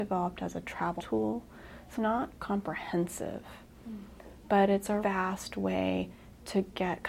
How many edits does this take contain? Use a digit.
3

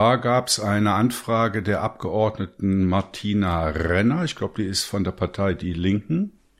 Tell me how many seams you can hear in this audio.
0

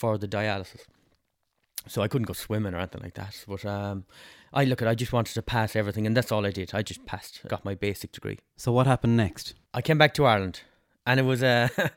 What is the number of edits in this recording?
2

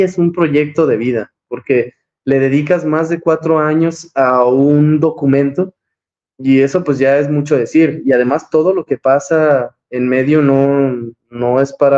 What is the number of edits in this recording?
0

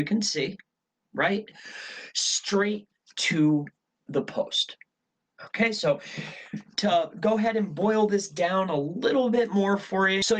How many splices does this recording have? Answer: 0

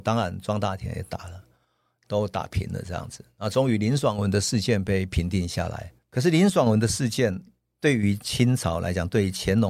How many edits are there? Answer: 1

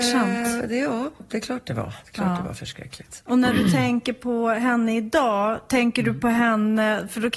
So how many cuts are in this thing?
0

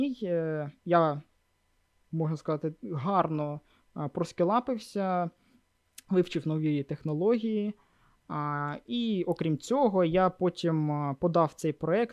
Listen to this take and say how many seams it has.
0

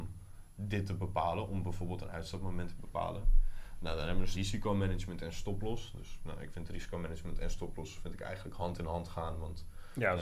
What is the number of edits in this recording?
1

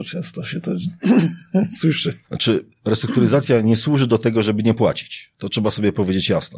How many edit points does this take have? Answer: 1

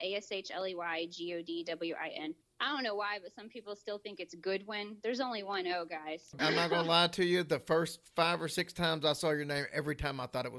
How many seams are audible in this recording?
1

